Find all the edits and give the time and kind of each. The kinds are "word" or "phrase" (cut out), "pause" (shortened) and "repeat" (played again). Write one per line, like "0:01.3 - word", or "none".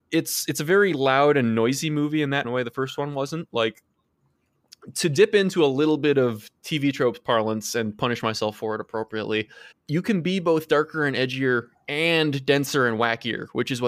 0:02.4 - phrase
0:09.7 - pause